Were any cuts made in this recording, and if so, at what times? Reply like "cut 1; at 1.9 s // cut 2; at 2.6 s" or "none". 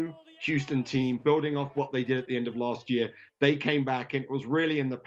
none